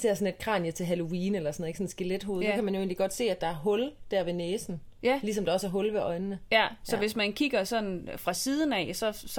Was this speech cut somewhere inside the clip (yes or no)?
no